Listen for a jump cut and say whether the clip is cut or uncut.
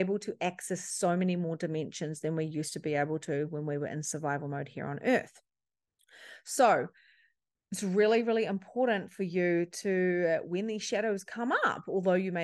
uncut